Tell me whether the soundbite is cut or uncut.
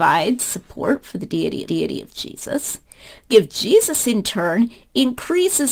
cut